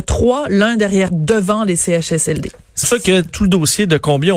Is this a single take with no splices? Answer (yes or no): no